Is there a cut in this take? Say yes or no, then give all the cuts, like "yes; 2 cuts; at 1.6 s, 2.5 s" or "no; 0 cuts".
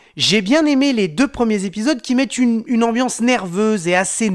no; 0 cuts